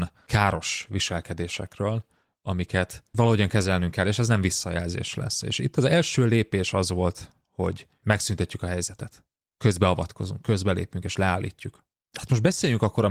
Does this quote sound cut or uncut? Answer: uncut